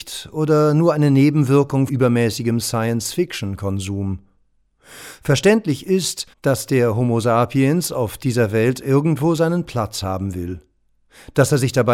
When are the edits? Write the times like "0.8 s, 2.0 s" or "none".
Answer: 1.9 s, 6.3 s